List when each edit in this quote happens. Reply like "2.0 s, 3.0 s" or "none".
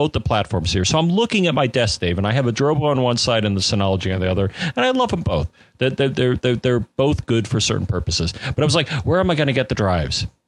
none